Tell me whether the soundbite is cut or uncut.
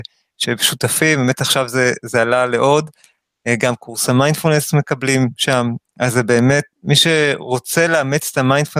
cut